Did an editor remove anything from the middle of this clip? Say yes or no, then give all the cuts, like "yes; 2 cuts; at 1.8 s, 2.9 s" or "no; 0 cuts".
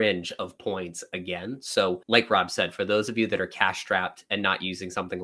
yes; 1 cut; at 2.0 s